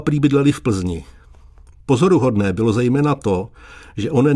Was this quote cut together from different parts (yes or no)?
no